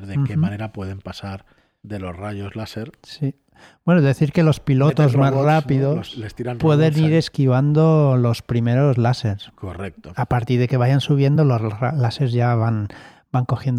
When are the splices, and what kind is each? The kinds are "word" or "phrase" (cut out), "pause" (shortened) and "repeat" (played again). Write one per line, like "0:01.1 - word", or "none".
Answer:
none